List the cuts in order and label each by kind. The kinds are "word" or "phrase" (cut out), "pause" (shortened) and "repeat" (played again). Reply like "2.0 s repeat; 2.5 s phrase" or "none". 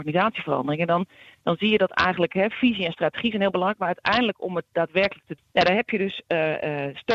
5.4 s word